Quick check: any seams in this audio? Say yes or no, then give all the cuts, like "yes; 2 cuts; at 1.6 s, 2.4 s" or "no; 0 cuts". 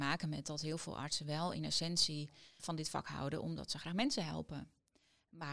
yes; 1 cut; at 2.6 s